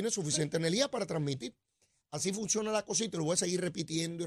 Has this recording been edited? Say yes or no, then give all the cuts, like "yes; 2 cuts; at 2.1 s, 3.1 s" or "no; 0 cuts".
no; 0 cuts